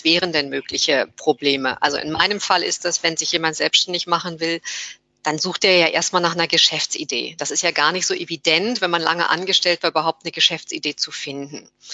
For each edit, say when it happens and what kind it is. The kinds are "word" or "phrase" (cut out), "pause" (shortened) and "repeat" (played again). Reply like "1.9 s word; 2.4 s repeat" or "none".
none